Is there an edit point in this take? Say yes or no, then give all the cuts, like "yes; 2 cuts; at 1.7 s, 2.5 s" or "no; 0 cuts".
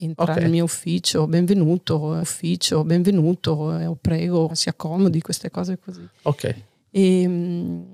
yes; 2 cuts; at 2.2 s, 4.5 s